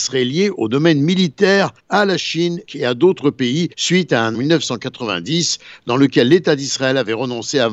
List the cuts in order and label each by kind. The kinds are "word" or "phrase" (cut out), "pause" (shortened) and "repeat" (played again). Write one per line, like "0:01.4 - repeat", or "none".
0:01.8 - pause
0:02.7 - word
0:03.7 - pause
0:04.3 - phrase

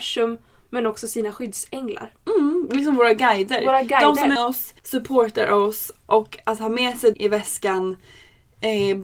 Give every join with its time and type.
0:04.4 - word
0:04.8 - pause
0:07.1 - word

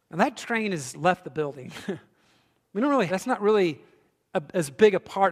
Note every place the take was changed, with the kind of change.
0:03.1 - word

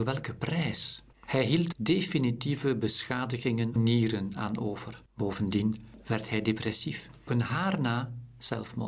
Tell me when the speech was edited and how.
0:01.1 - pause
0:01.7 - word
0:03.8 - phrase
0:05.1 - pause
0:07.3 - phrase

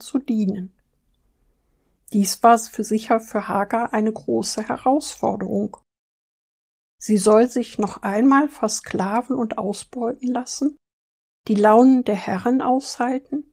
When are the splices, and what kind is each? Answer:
none

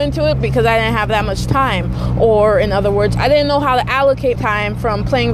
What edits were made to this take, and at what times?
0:04.4 - word

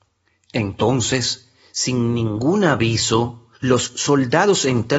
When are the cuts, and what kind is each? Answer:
0:03.5 - pause

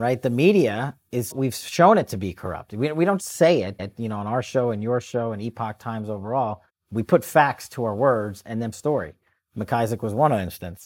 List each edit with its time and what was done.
0:01.3 - word
0:03.2 - word
0:03.8 - repeat
0:06.7 - pause
0:08.7 - phrase

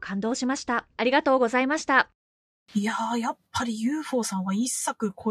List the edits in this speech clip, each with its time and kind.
0:00.9 - pause
0:02.5 - pause

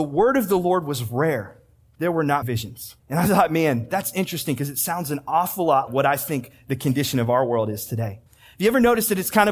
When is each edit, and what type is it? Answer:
0:02.4 - word
0:03.0 - pause
0:05.9 - word
0:08.3 - pause

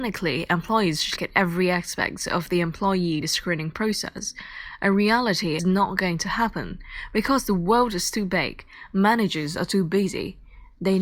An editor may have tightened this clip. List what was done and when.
0:01.2 - word
0:03.2 - word
0:05.6 - word

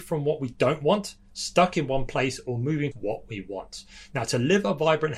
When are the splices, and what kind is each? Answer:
0:02.9 - word

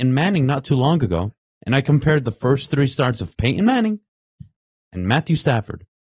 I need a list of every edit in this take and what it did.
none

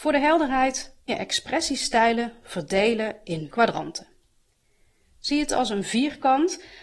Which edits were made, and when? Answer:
0:01.1 - word
0:03.5 - word

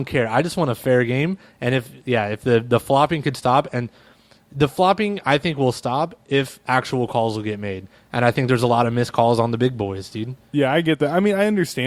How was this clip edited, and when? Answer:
none

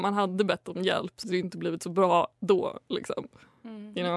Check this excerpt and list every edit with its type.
0:01.2 - word
0:02.3 - pause

